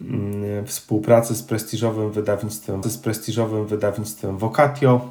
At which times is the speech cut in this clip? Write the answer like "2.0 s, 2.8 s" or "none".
2.8 s